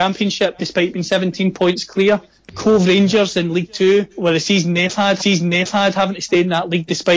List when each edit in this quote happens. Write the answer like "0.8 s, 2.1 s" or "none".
4.1 s, 5.2 s